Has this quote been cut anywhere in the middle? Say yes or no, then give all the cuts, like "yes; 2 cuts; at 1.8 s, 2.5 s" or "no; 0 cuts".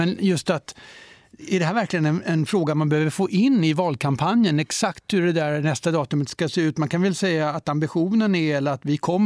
no; 0 cuts